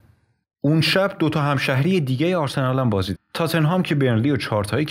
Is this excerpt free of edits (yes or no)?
no